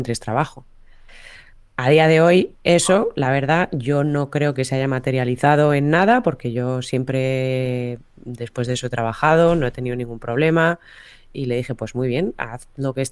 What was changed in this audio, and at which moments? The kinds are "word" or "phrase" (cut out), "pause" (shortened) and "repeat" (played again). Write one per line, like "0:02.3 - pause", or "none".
none